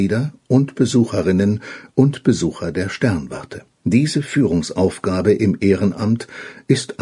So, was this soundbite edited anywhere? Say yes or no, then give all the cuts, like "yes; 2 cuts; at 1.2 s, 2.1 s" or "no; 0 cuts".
yes; 1 cut; at 3.7 s